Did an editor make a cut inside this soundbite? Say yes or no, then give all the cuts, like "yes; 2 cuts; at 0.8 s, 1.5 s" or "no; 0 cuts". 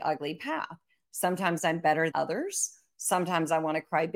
yes; 1 cut; at 2.1 s